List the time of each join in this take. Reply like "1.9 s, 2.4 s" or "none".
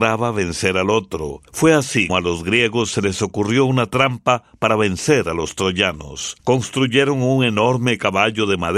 1.5 s, 2.1 s, 6.4 s